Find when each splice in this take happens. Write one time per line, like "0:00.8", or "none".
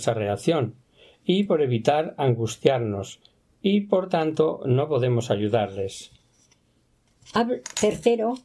none